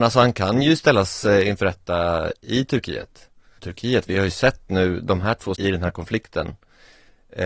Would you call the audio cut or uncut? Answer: cut